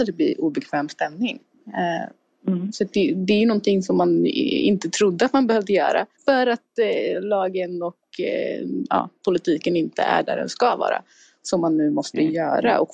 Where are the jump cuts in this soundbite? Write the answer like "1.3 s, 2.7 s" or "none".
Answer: 6.1 s